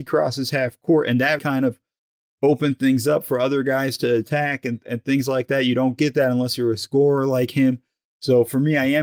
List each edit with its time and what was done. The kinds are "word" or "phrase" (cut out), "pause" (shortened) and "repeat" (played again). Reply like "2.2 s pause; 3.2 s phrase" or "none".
1.4 s word